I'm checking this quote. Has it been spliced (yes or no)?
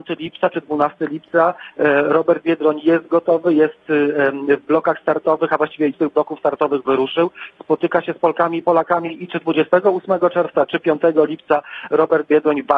yes